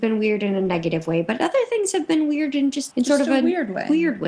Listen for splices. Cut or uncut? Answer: cut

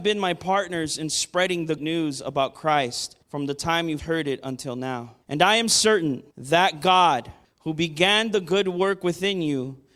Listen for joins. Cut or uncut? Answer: cut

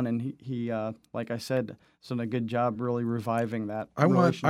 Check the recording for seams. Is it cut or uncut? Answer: uncut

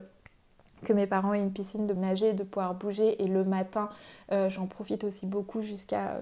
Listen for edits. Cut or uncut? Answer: cut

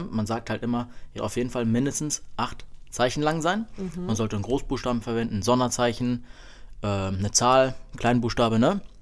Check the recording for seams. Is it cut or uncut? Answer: cut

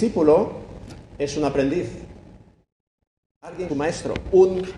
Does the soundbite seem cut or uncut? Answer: cut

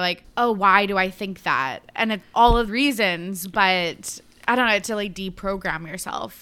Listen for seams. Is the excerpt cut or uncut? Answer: cut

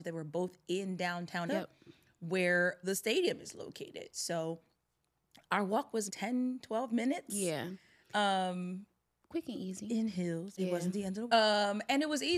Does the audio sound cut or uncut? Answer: cut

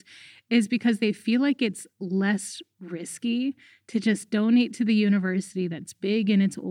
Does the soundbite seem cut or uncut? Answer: uncut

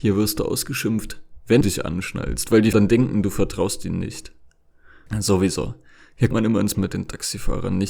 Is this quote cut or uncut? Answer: cut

